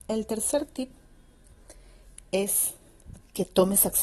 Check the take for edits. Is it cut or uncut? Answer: uncut